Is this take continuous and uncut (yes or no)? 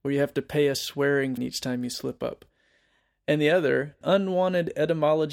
no